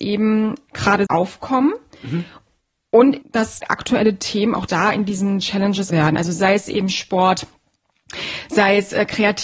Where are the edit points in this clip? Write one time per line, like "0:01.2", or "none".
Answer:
0:01.1
0:03.2
0:04.7
0:05.9